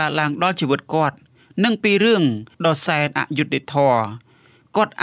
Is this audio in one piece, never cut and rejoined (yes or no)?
no